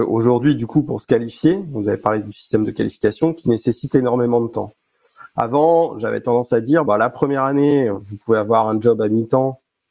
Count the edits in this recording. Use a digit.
1